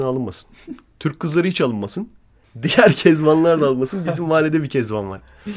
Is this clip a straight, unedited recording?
yes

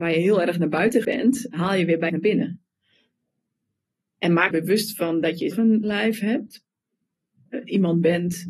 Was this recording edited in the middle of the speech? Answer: yes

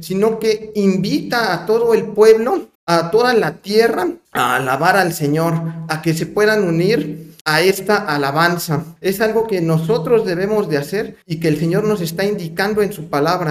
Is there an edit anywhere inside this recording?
yes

